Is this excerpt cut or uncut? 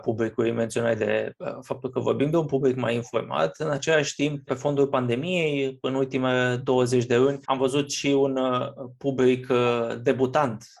cut